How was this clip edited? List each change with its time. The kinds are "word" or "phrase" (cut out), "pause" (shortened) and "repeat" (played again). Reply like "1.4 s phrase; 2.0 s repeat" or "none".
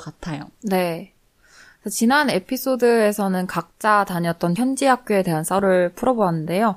4.6 s word